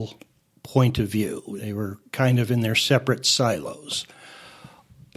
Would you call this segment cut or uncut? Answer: uncut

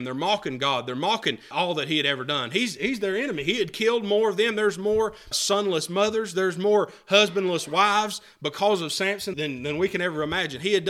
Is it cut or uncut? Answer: cut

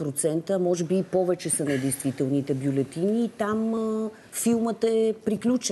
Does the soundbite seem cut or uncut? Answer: uncut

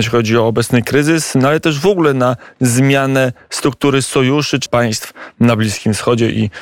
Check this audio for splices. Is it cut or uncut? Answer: cut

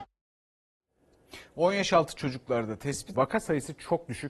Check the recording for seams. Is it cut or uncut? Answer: cut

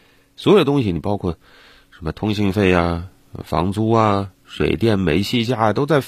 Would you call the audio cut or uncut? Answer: uncut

